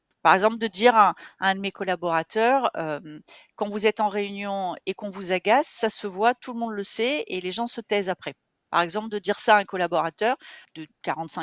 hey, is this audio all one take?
yes; 0 cuts

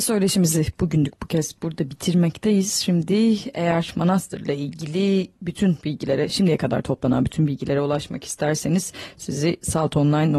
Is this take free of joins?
yes; 0 cuts

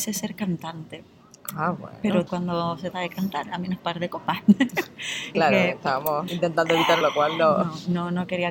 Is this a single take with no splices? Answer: no; 6 cuts; at 2.3 s, 2.9 s, 3.8 s, 5.3 s, 6.3 s, 7.0 s

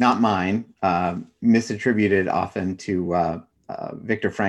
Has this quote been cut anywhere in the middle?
no; 0 cuts

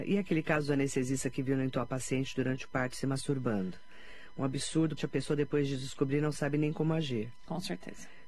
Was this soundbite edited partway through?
yes; 1 cut; at 5.0 s

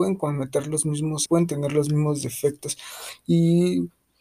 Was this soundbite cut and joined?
yes; 1 cut; at 1.3 s

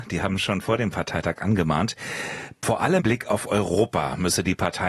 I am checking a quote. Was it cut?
yes; 1 cut; at 3.0 s

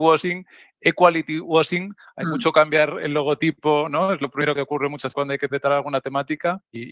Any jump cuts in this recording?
yes; 2 cuts; at 4.6 s, 5.1 s

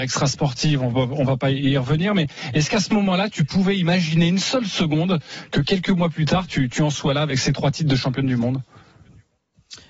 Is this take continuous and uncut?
yes; 0 cuts

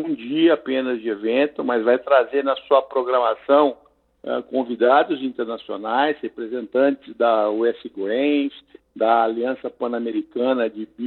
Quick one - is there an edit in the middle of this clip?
no; 0 cuts

